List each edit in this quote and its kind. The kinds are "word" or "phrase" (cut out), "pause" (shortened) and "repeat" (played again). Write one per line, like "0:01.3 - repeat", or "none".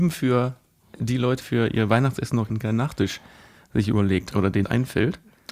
0:01.4 - word
0:02.5 - word
0:04.3 - word
0:04.6 - word